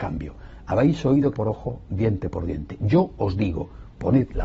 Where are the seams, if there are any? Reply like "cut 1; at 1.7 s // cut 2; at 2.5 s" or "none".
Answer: cut 1; at 1.3 s